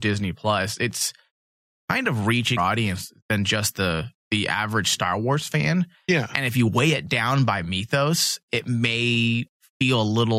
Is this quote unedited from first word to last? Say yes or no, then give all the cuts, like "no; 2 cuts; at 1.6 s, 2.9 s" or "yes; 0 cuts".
no; 1 cut; at 2.6 s